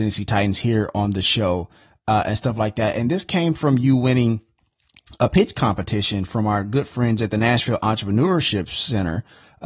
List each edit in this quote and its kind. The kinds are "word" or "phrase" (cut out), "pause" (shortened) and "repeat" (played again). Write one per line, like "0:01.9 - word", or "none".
none